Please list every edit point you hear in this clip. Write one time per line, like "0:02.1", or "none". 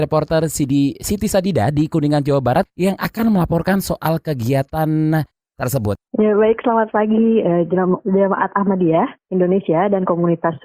0:06.1

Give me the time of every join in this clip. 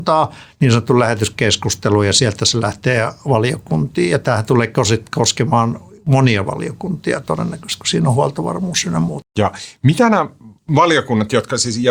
0:09.3

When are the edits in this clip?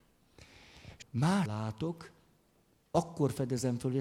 0:01.0
0:01.5

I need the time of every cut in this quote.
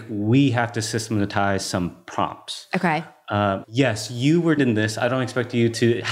0:03.6
0:04.6

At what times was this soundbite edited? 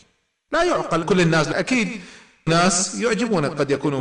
0:01.0
0:01.5
0:02.5

